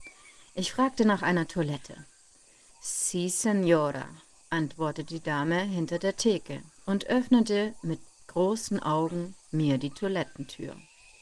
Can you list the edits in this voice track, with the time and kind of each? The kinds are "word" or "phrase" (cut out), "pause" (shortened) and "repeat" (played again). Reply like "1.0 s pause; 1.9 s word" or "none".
none